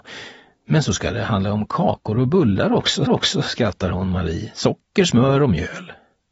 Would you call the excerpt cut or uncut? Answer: cut